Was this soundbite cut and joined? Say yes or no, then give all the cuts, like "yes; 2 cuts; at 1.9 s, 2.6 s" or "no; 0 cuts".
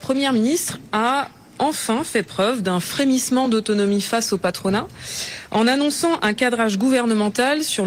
no; 0 cuts